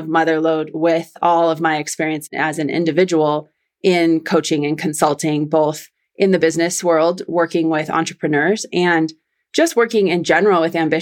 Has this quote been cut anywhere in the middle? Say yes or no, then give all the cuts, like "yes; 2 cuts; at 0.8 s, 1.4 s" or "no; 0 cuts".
no; 0 cuts